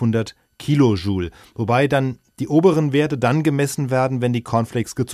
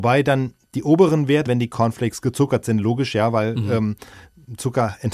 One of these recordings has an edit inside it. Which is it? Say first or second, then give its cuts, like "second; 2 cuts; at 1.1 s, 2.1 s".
second; 1 cut; at 1.5 s